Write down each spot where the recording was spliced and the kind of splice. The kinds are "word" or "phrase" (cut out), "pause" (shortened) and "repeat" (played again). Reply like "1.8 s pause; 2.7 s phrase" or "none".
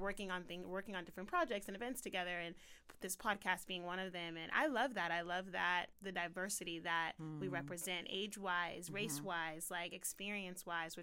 5.9 s word